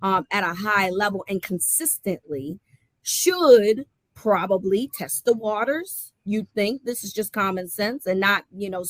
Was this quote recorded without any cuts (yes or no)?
yes